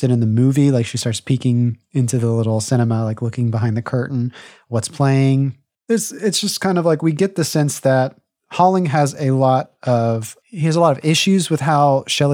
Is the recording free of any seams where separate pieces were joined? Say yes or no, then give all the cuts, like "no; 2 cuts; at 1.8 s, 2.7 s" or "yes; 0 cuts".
yes; 0 cuts